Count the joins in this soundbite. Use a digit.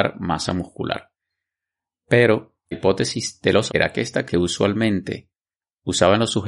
3